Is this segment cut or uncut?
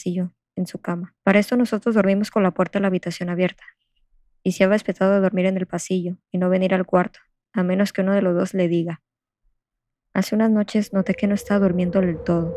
cut